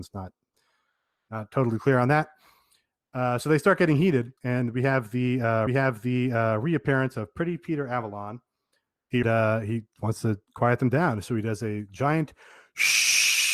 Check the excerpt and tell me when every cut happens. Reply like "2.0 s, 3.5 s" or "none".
4.4 s, 5.7 s, 9.2 s, 10.5 s

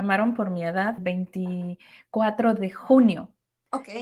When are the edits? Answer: 1.0 s

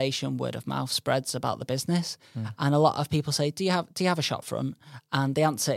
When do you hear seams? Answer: none

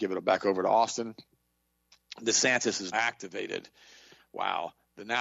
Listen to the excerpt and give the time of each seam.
2.9 s

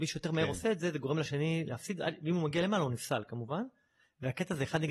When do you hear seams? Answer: none

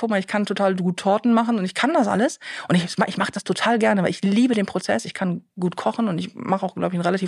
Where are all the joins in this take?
none

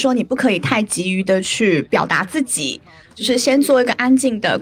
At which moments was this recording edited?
none

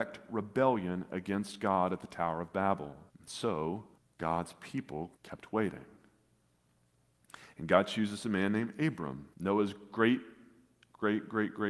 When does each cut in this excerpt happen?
3.1 s, 4.0 s, 5.2 s, 9.3 s

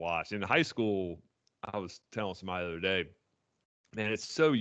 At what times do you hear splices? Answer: none

